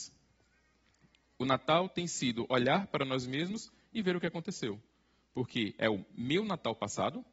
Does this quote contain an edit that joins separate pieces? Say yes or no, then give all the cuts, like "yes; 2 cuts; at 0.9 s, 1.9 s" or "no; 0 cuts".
no; 0 cuts